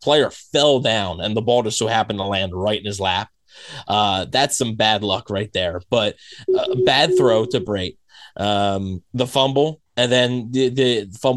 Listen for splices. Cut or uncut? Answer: uncut